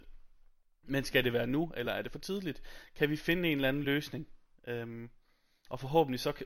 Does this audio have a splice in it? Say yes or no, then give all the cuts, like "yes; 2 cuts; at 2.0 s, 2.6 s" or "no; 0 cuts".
no; 0 cuts